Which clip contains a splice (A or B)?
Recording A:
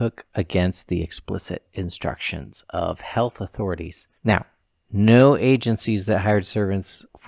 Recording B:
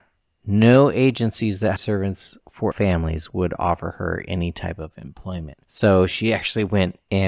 B